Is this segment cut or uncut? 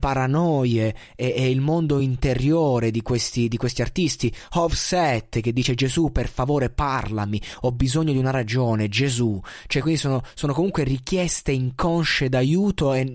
uncut